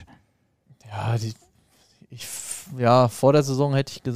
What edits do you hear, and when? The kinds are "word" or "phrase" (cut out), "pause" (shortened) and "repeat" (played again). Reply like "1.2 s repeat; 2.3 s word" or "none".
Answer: none